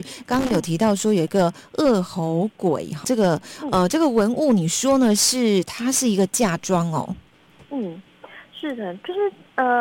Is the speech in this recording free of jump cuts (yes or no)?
no